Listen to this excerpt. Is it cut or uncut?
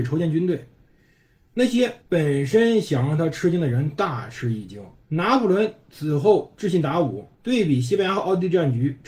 cut